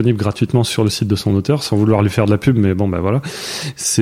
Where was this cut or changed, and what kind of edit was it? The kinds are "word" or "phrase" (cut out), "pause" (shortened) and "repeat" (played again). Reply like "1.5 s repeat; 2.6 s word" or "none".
none